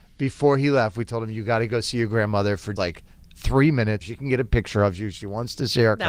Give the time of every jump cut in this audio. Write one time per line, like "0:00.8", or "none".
0:02.8
0:04.0